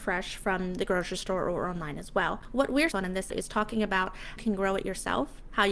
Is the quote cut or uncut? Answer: cut